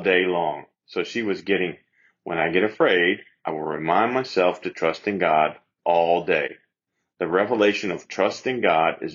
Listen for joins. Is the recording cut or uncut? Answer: uncut